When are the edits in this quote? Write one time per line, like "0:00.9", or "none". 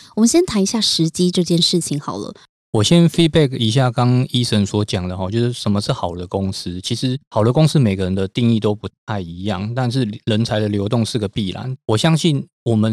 0:07.2